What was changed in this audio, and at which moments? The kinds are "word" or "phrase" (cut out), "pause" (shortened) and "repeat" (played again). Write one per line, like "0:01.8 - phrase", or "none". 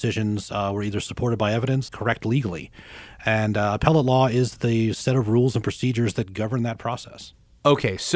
0:01.9 - phrase